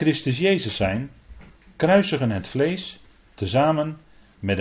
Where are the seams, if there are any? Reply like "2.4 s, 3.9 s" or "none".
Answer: none